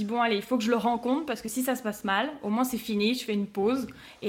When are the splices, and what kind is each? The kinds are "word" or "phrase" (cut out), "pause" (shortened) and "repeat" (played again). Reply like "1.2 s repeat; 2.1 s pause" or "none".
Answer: none